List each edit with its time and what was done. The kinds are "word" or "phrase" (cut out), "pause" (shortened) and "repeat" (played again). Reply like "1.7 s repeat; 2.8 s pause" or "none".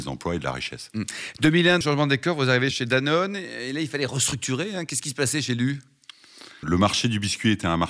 1.8 s word; 2.7 s word; 6.6 s word